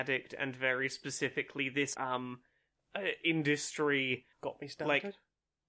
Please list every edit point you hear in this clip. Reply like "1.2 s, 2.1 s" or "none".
1.9 s, 4.3 s